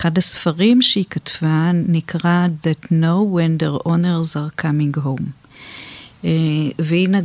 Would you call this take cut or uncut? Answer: cut